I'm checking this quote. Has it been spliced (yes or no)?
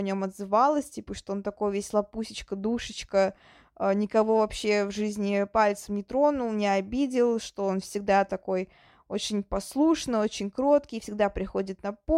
no